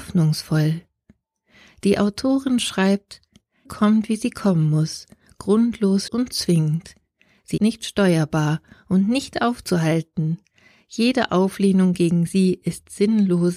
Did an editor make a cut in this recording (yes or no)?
yes